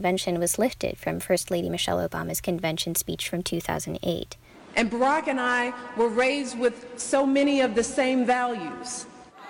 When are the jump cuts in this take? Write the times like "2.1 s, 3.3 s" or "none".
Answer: none